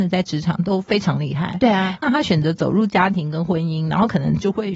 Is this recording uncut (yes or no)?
no